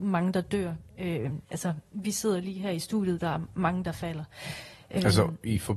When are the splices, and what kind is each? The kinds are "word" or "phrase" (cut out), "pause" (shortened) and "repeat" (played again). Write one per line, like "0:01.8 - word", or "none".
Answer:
0:01.4 - pause